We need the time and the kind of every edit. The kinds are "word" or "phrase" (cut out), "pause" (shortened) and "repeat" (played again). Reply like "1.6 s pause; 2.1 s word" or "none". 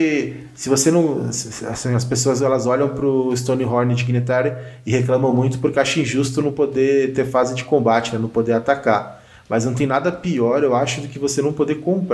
none

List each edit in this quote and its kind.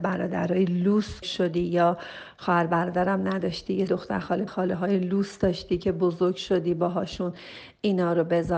1.2 s word; 3.9 s word; 4.5 s word

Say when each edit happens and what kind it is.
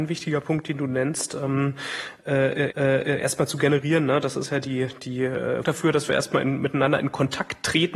2.7 s repeat; 5.6 s word

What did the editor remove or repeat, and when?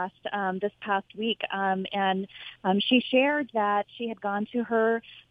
none

